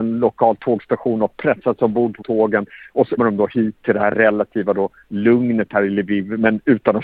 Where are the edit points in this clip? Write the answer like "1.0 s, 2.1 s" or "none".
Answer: 2.2 s, 3.2 s